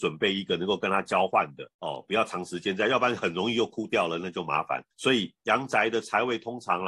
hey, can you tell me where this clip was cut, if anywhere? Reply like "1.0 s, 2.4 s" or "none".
1.7 s, 4.9 s